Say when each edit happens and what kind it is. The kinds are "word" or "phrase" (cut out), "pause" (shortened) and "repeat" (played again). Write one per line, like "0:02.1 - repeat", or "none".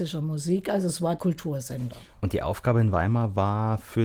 0:01.2 - word